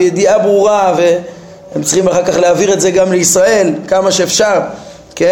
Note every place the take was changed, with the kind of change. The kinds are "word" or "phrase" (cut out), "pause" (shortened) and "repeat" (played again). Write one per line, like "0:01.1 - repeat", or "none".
none